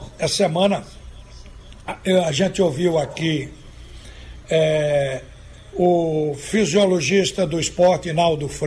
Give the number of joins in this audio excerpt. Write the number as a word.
zero